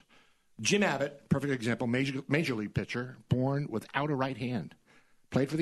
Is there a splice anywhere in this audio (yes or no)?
no